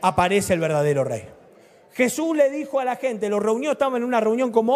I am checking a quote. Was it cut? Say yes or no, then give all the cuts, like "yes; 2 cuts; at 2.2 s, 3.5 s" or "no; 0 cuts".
yes; 1 cut; at 1.5 s